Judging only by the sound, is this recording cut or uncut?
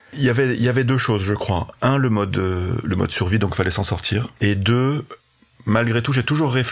uncut